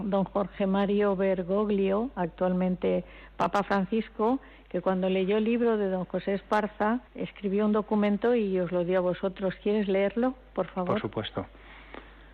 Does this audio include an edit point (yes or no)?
yes